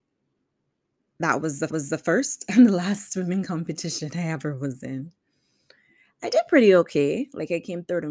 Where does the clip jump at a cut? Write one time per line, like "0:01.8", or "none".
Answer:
0:01.7